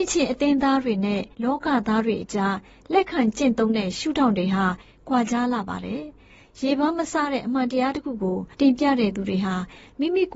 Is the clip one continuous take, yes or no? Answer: no